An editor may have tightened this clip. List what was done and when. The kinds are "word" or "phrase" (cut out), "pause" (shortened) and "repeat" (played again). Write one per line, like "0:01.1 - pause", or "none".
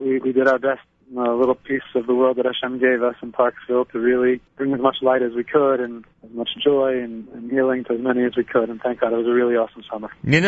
0:04.5 - pause
0:06.1 - pause

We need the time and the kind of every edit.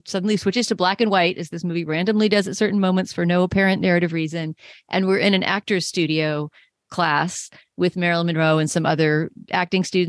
none

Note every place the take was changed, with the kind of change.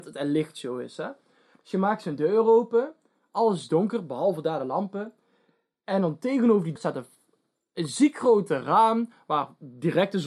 0:06.8 - word

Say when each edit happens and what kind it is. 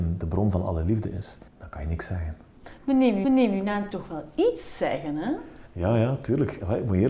0:01.5 - pause
0:03.2 - repeat
0:03.9 - phrase
0:05.7 - pause

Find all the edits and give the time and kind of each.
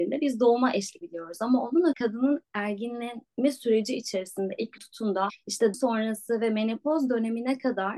0:01.0 - word
0:01.9 - word
0:04.8 - word
0:05.7 - word

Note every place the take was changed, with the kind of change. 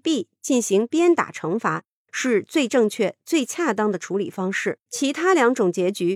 0:04.9 - pause

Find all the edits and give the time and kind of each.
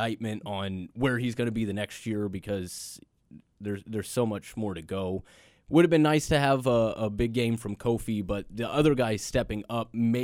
none

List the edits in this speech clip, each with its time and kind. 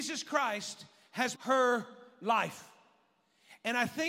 0:01.3 - word

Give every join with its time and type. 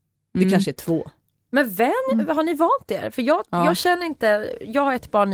none

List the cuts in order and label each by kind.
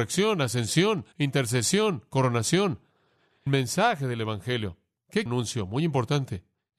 0:01.1 - pause
0:03.5 - word
0:05.3 - phrase

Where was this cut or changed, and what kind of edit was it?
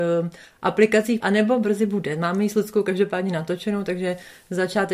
0:01.2 - word

